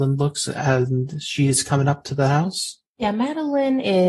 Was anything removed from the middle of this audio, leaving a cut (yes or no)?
no